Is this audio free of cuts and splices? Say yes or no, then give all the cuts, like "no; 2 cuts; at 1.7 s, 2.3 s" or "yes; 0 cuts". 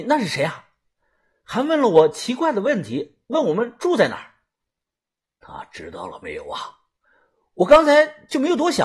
yes; 0 cuts